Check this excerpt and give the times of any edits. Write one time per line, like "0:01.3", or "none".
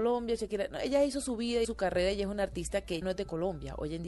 0:01.6
0:03.0